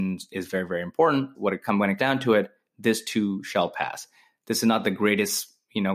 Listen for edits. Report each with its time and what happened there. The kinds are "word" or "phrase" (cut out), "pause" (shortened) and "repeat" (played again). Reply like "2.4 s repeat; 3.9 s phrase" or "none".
1.3 s word; 2.0 s word